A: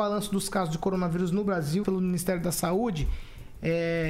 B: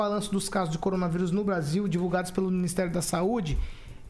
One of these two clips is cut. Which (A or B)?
A